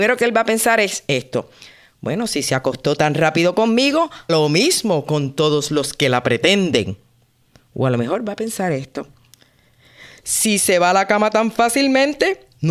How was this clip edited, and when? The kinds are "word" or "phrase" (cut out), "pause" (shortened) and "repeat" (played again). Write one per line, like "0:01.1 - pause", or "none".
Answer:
0:04.3 - word